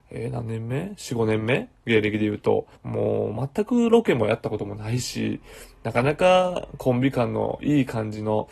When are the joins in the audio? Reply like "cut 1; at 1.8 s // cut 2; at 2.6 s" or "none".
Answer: cut 1; at 2.8 s